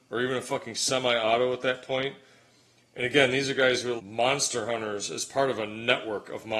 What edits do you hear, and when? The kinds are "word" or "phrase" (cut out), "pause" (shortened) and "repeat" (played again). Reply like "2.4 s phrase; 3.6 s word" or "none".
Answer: 4.0 s word